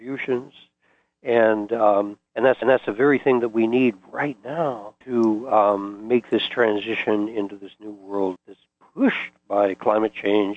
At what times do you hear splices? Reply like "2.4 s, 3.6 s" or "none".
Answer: 2.3 s, 2.6 s, 5.0 s, 8.4 s